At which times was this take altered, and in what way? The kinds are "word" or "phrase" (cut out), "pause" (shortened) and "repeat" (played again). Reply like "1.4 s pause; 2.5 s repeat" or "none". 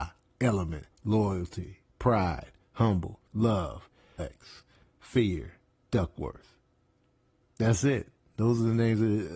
0.9 s word; 3.3 s word; 4.2 s word; 5.8 s word